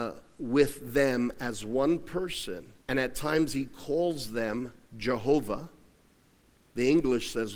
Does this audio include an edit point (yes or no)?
yes